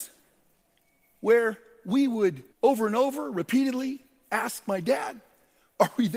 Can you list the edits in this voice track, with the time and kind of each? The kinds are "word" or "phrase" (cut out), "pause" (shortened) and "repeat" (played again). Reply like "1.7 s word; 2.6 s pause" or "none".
2.5 s pause